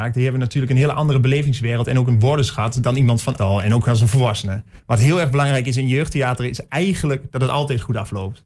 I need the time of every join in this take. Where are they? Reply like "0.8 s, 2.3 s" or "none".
3.4 s, 4.8 s